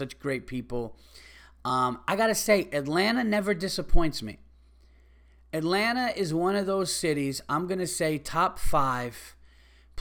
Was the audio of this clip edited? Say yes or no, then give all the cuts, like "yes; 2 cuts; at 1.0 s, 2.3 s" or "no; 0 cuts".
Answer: no; 0 cuts